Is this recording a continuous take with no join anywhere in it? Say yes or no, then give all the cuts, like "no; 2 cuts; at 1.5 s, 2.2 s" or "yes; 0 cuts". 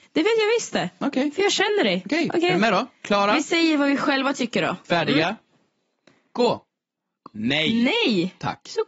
yes; 0 cuts